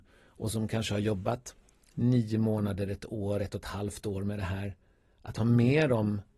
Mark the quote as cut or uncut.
uncut